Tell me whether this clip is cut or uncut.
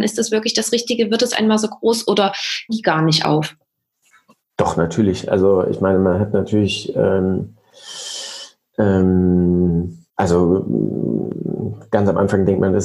cut